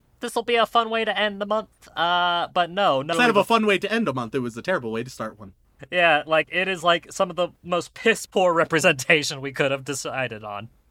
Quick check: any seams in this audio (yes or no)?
yes